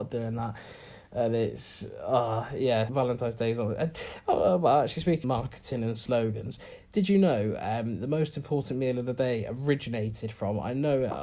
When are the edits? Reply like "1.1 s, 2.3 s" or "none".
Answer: 2.9 s, 5.2 s